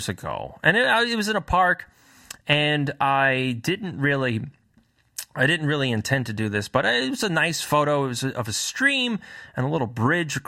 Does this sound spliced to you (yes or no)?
no